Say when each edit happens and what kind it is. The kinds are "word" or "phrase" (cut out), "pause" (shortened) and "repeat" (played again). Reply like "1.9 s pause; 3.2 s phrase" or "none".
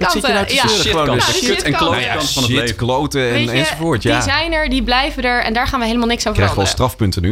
none

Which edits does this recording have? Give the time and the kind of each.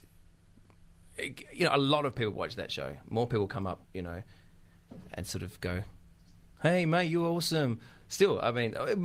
3.8 s pause

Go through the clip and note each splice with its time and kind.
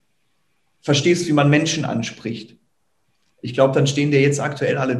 none

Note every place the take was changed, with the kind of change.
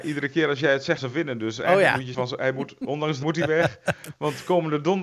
1.0 s word; 2.1 s word; 3.2 s word

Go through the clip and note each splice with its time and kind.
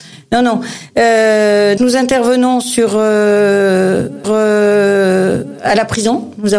1.8 s word; 4.2 s repeat

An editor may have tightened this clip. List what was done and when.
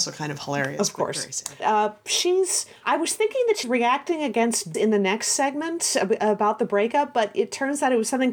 1.6 s word; 2.8 s pause; 3.6 s word; 4.7 s word

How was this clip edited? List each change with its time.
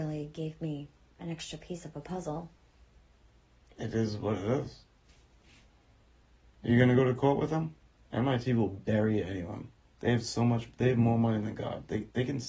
none

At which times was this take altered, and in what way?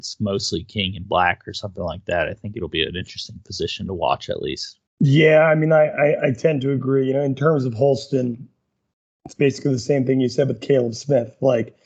4.9 s pause

